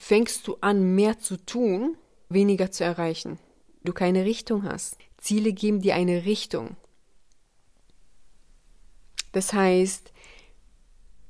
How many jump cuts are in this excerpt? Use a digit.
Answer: 2